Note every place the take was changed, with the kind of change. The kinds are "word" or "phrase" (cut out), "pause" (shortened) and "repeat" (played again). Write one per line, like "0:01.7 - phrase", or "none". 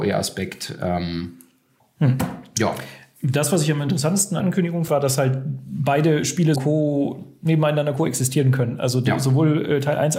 0:01.8 - pause
0:04.4 - word
0:04.9 - word
0:06.6 - word

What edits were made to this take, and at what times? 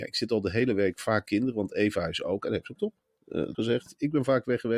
0:01.3 - word
0:02.8 - word
0:03.5 - phrase

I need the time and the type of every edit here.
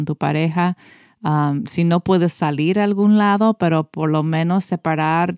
none

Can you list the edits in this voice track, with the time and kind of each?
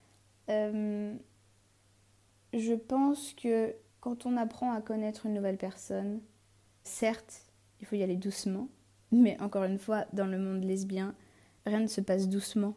0:03.9 - pause
0:06.8 - word

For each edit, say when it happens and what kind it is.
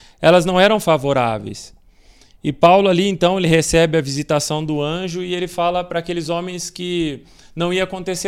none

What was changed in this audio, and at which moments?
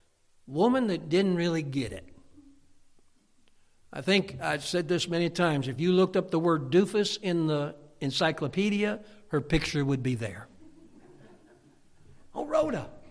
none

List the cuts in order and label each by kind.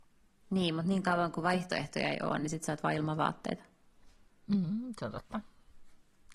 none

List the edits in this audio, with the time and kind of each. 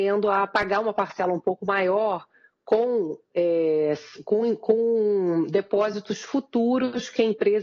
none

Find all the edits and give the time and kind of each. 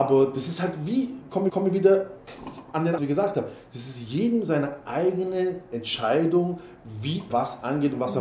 0:01.5 - repeat
0:03.0 - phrase
0:07.3 - word

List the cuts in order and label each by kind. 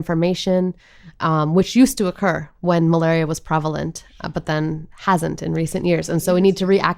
none

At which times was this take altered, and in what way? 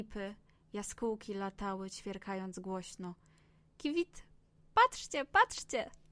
0:03.8 - word

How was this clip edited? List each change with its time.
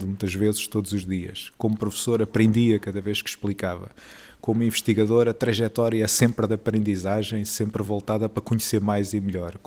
none

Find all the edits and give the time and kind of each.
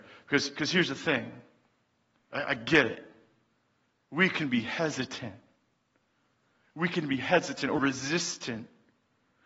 0:07.8 - word

